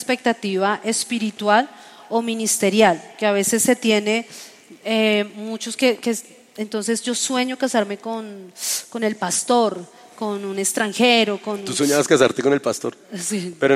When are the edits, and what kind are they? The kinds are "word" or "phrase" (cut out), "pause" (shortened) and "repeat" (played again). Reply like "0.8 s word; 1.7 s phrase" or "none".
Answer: 3.1 s pause